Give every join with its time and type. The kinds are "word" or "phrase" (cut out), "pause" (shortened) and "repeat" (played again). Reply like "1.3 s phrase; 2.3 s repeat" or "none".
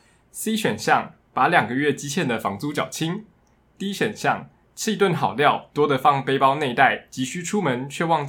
none